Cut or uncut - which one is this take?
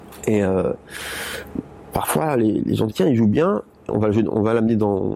cut